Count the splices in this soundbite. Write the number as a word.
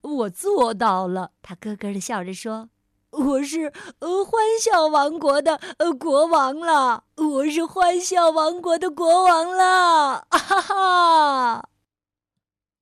two